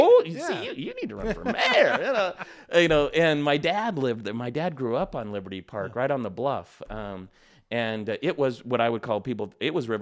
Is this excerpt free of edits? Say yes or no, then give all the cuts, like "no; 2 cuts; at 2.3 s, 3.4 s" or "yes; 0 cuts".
yes; 0 cuts